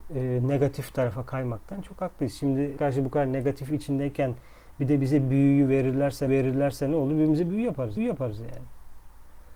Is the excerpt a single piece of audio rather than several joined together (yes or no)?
no